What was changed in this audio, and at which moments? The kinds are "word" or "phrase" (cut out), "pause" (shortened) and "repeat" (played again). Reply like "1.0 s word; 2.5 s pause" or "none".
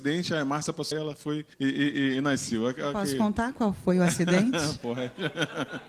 0.9 s word; 1.5 s pause